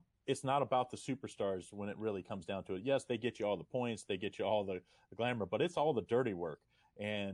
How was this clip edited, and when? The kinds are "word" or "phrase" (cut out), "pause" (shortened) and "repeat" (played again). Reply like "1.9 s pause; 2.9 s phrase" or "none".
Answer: none

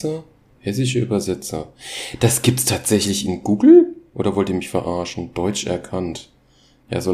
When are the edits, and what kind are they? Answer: none

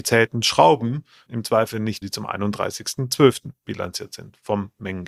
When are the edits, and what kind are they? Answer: 1.3 s word; 2.0 s phrase

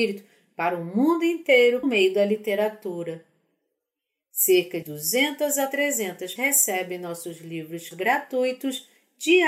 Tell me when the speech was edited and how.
1.8 s word; 4.8 s word; 6.4 s word; 7.9 s word

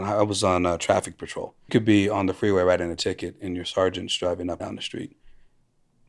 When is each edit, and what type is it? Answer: 1.7 s phrase; 4.6 s word

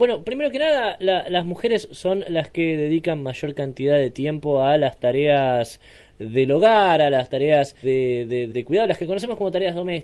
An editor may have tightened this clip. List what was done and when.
7.8 s word; 8.5 s word

